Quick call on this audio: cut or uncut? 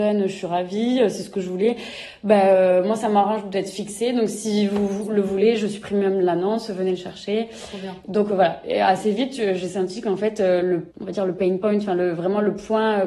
cut